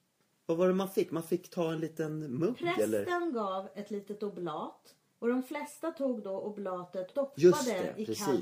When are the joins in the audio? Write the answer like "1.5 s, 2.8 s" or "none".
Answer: 5.1 s, 7.1 s